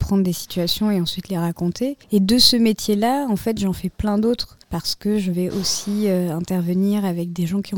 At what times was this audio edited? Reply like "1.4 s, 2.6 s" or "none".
2.0 s, 4.6 s